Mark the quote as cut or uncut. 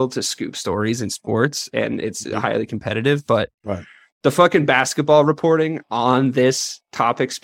uncut